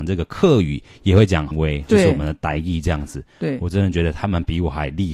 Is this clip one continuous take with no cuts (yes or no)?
no